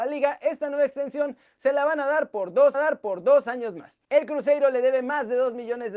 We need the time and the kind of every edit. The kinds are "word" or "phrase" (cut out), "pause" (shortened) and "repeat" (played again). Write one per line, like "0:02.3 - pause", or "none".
0:02.7 - repeat
0:04.0 - pause